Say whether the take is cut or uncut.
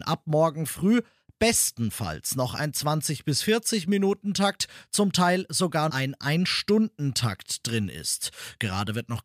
cut